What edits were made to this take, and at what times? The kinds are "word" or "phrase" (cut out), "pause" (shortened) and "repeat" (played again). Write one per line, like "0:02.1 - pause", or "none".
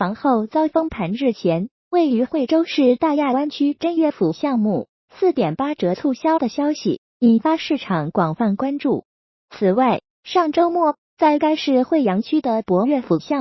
none